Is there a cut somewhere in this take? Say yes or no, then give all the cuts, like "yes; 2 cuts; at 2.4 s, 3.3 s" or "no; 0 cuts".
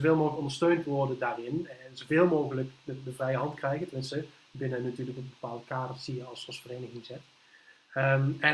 no; 0 cuts